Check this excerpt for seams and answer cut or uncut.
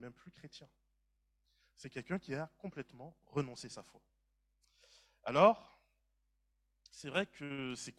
uncut